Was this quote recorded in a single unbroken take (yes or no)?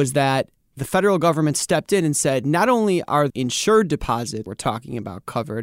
no